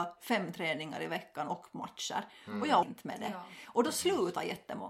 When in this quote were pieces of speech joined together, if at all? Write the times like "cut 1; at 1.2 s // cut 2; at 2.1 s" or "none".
cut 1; at 2.8 s